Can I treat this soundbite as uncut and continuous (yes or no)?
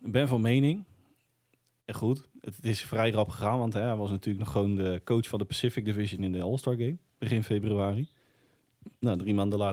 no